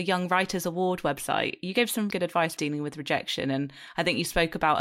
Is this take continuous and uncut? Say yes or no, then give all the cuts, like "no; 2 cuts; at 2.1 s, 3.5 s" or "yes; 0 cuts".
no; 2 cuts; at 2.1 s, 2.6 s